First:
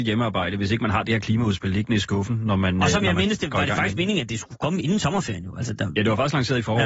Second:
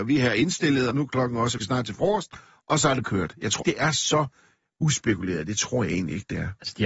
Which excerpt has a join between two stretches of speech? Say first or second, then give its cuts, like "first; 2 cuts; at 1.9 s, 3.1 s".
second; 4 cuts; at 0.9 s, 1.6 s, 3.0 s, 3.6 s